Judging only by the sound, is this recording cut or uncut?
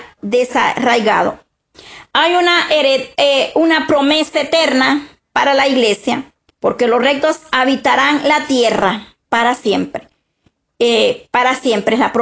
uncut